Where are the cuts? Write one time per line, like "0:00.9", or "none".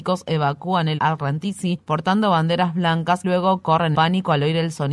0:01.0
0:03.2
0:03.9